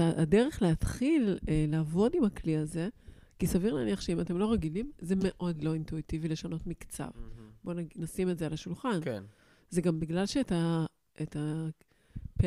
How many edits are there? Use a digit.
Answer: 0